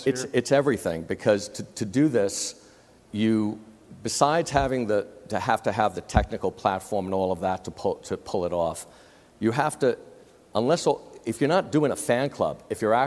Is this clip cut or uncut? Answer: uncut